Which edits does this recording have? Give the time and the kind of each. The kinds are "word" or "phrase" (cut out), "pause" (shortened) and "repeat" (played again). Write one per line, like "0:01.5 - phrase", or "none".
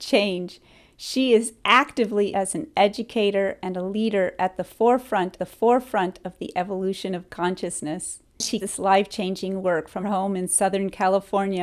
0:02.3 - word
0:05.4 - repeat
0:08.6 - word
0:10.0 - word